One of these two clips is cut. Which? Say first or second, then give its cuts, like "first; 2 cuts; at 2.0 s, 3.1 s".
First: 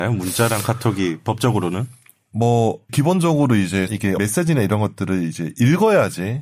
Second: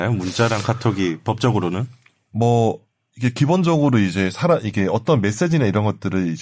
first; 3 cuts; at 2.9 s, 3.9 s, 4.2 s